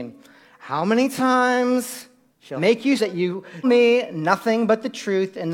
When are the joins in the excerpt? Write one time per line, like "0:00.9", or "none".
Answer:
0:02.6
0:03.0
0:03.6